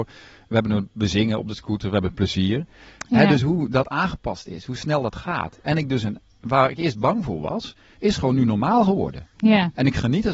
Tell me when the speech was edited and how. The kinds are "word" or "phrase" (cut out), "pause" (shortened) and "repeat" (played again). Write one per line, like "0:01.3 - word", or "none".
none